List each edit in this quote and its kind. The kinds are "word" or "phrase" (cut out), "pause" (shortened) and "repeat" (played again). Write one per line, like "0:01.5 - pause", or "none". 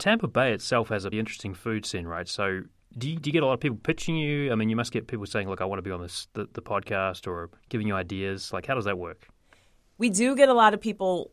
0:01.1 - word
0:07.6 - pause